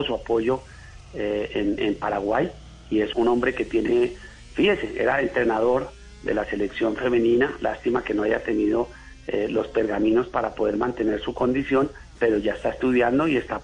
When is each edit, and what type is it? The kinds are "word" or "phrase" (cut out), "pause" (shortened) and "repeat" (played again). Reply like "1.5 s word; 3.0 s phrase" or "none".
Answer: 1.8 s word; 3.1 s word